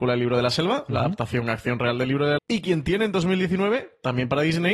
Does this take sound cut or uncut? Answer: cut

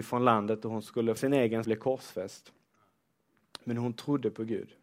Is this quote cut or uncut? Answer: cut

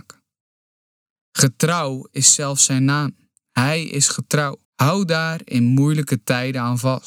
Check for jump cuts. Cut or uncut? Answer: cut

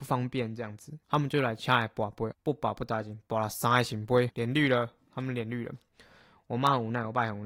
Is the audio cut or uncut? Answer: cut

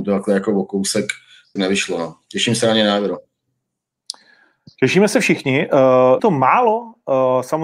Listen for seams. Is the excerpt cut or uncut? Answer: cut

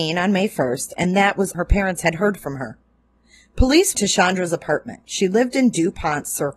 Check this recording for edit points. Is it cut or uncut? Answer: cut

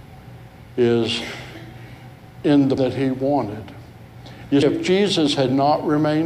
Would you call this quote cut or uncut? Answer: cut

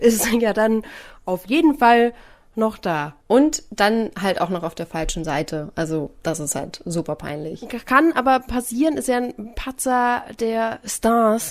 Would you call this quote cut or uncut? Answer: cut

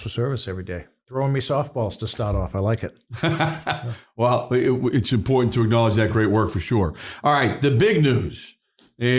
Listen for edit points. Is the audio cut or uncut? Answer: uncut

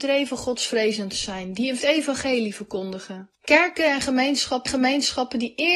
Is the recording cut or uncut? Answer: cut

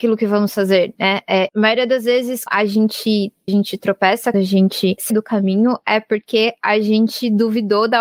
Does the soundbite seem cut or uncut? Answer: cut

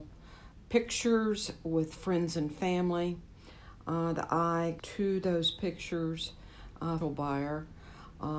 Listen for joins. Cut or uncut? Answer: cut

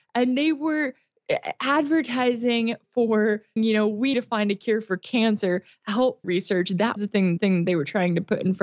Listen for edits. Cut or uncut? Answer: cut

